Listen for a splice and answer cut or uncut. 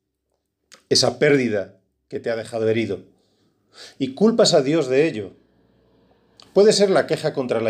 uncut